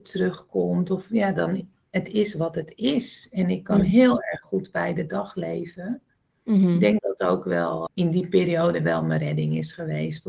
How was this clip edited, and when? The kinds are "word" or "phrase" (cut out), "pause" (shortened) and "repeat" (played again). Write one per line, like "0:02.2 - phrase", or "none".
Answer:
0:07.0 - word
0:07.9 - word

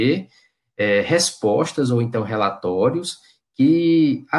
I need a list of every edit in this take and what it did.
none

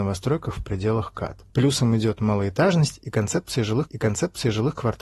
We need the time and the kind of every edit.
0:03.9 - repeat

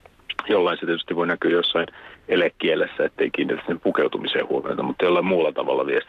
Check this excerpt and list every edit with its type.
none

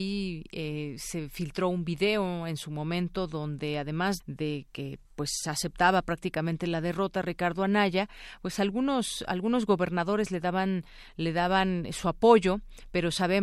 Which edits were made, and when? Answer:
0:04.2 - word
0:05.0 - pause

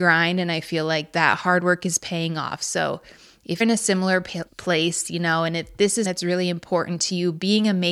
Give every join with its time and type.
0:03.6 - word
0:04.5 - pause
0:06.0 - word

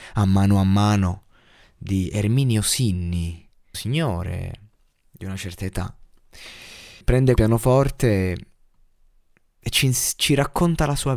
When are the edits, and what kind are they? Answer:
0:03.7 - word
0:07.0 - word
0:07.4 - word

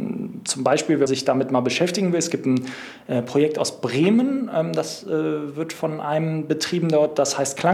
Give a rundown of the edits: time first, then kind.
0:01.1 - word

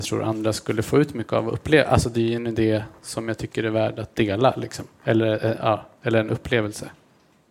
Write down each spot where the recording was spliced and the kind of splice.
none

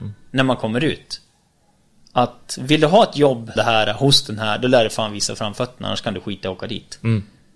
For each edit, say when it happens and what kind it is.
0:03.6 - word

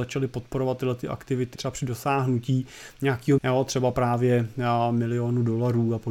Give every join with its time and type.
0:01.5 - word
0:03.4 - word

